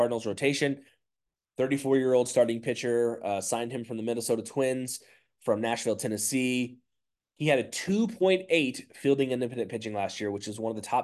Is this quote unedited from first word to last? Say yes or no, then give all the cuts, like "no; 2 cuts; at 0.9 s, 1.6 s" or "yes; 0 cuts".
yes; 0 cuts